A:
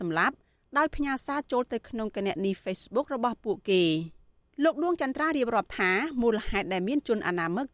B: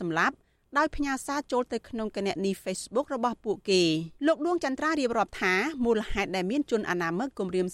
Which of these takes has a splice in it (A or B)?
B